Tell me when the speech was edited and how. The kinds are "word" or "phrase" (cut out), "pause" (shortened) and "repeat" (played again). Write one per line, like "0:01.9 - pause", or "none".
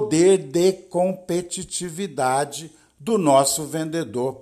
none